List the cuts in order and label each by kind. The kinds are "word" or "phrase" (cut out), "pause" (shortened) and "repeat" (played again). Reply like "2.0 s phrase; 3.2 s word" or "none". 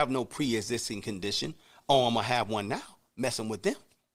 none